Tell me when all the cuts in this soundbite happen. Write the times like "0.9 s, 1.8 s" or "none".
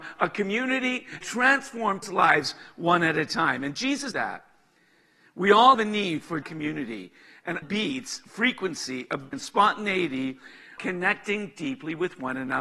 1.2 s, 2.0 s, 4.1 s, 5.7 s, 6.4 s, 7.6 s, 9.3 s, 10.8 s